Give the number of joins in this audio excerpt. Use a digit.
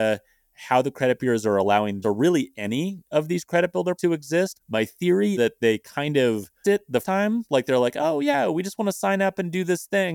5